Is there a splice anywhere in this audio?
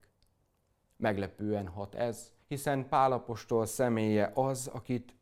yes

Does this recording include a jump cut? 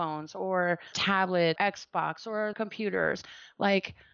yes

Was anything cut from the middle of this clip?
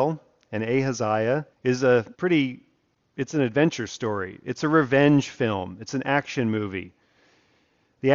yes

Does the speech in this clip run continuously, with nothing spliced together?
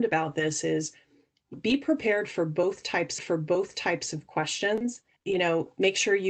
no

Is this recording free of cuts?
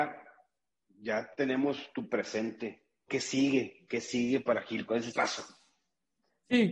no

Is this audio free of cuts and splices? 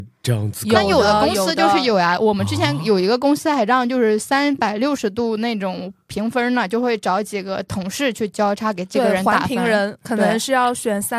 yes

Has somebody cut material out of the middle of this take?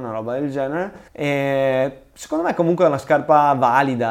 yes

